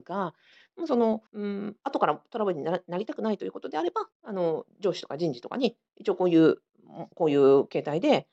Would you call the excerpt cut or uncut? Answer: cut